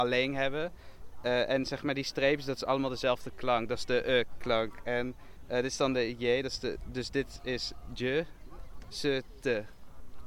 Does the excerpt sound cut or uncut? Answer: uncut